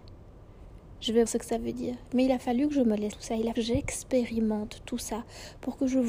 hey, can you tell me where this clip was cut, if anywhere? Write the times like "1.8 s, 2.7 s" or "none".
1.3 s, 3.1 s, 3.5 s